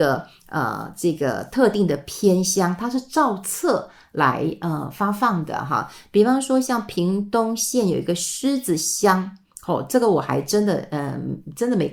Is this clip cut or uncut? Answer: uncut